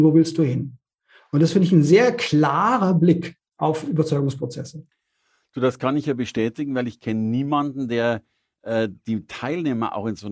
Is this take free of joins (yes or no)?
yes